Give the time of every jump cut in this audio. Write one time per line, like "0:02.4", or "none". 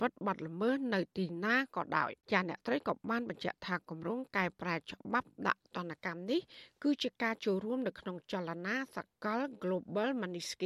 0:02.2